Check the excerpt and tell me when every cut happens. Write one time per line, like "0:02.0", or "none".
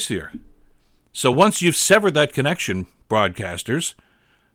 none